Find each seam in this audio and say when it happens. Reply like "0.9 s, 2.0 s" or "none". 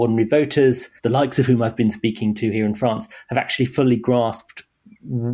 1.0 s